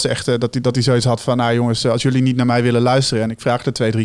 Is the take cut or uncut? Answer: uncut